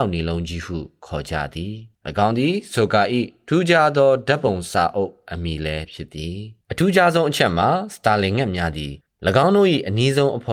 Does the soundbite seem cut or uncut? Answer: cut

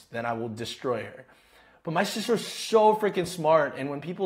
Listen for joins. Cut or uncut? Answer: uncut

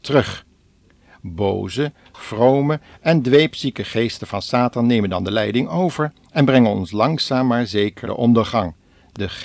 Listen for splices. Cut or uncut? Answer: cut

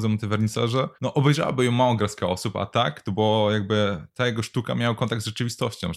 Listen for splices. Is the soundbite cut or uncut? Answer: cut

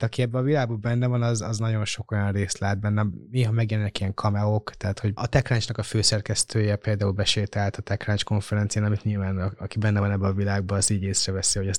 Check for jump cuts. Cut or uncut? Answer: uncut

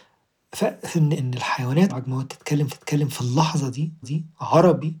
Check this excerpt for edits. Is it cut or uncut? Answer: cut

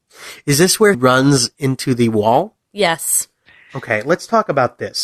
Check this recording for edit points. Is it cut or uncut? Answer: cut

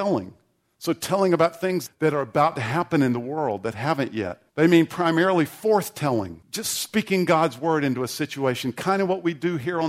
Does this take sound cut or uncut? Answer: cut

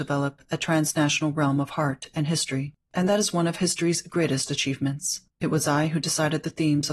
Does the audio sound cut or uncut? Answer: cut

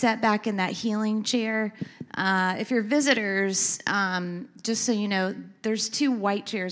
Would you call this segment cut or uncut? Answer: uncut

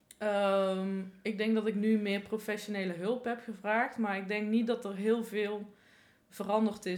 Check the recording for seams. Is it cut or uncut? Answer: uncut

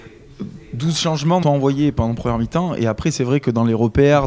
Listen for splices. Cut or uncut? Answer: cut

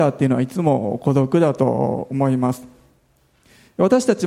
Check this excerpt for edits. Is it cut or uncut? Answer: uncut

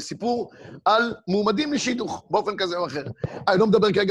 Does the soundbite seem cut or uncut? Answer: uncut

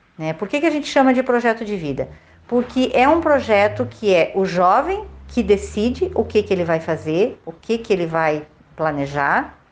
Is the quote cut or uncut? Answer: uncut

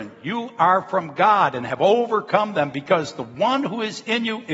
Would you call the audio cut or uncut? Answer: uncut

